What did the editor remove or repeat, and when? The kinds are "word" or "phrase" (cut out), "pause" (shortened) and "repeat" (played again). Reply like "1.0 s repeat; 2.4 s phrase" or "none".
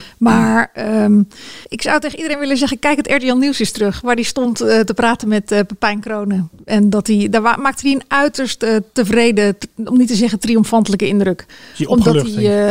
1.6 s pause